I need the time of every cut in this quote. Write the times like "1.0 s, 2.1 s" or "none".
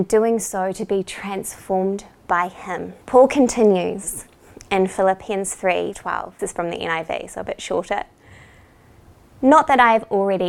3.0 s, 5.9 s, 6.4 s

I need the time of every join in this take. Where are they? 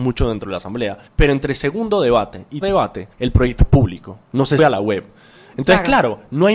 1.1 s, 2.6 s, 3.1 s, 3.6 s, 4.2 s, 4.6 s

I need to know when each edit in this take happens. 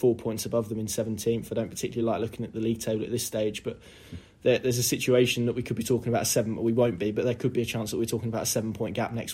none

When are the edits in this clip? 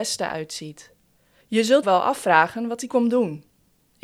1.8 s, 2.9 s

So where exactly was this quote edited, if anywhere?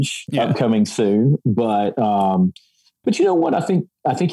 none

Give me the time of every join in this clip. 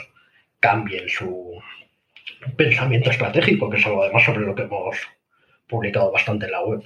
none

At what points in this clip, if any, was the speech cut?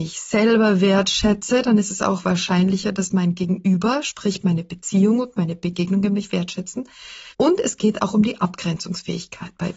7.3 s

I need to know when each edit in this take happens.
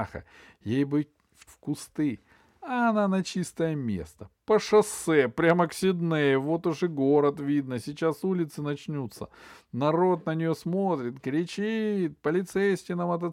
1.5 s

